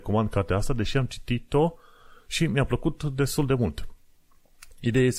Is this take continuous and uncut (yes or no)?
yes